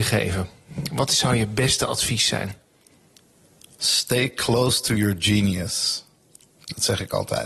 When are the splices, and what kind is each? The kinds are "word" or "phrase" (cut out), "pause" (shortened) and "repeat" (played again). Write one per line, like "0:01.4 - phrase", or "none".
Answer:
none